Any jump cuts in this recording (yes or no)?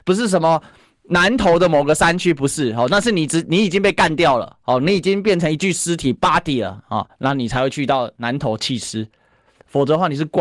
no